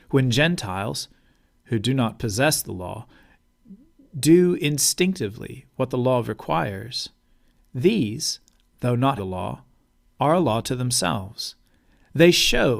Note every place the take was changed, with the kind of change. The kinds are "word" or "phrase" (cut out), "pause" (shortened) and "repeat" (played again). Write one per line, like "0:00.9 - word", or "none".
0:09.2 - word